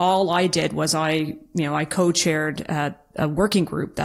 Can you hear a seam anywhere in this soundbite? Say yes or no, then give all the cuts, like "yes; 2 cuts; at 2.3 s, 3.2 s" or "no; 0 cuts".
no; 0 cuts